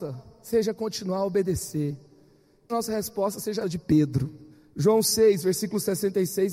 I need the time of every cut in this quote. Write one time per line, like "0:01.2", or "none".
0:02.7
0:03.6
0:04.5